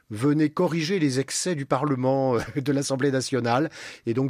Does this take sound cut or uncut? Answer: uncut